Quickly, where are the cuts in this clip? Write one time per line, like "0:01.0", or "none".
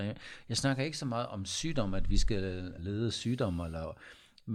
0:02.8